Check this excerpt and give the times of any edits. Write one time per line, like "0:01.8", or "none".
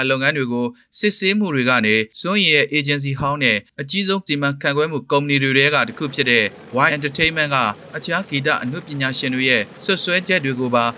0:04.3
0:06.9